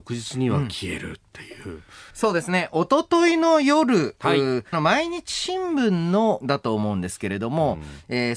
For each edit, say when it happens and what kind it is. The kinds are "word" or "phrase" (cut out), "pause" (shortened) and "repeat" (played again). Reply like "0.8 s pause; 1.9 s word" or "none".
1.3 s pause; 2.1 s pause; 4.7 s phrase; 6.4 s phrase

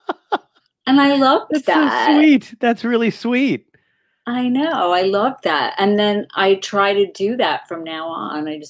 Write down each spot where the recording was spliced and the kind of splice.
none

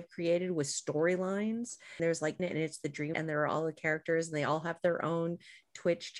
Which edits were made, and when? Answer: 2.0 s word; 2.4 s word; 3.1 s word

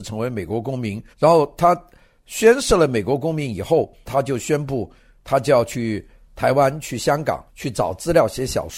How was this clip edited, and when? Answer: 1.1 s pause; 7.5 s pause

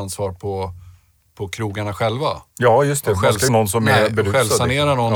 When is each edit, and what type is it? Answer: 3.5 s phrase

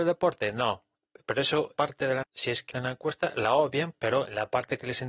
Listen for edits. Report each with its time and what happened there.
1.8 s word; 2.2 s word; 2.7 s word

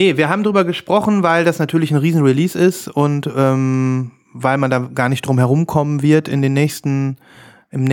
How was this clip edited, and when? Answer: none

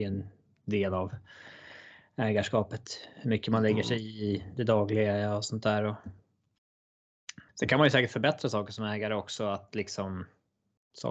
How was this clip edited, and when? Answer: 7.5 s pause

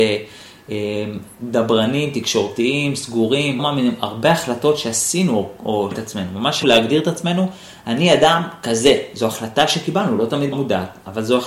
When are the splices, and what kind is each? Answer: 3.6 s phrase; 5.9 s word; 6.6 s word; 10.5 s word

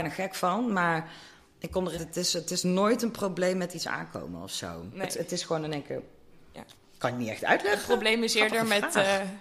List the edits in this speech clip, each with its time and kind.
1.9 s word

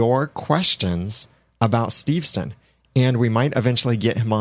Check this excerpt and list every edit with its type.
none

